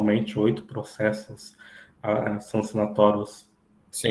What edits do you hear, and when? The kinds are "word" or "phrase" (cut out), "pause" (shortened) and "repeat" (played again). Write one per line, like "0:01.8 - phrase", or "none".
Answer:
none